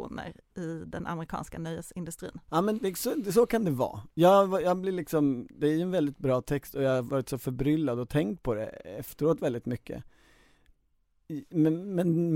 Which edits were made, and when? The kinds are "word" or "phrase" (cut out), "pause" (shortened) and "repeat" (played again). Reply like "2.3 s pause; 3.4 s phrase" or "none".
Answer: 2.8 s word